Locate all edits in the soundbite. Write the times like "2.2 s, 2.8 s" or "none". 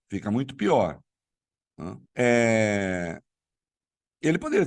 2.1 s